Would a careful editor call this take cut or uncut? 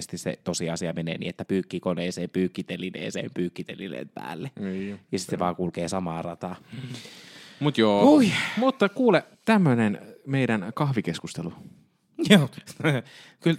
cut